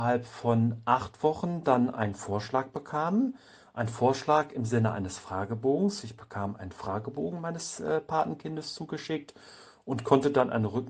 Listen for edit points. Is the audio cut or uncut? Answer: uncut